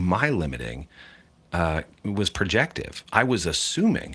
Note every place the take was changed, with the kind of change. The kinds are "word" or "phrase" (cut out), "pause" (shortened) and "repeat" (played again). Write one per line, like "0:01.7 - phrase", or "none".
none